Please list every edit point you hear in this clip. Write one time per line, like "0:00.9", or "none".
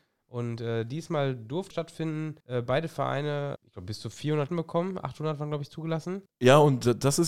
0:01.7
0:02.4
0:03.6
0:04.5
0:06.3